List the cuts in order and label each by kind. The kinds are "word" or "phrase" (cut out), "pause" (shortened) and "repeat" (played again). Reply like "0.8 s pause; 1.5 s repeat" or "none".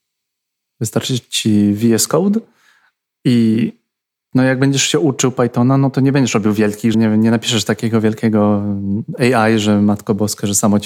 4.0 s pause; 6.9 s phrase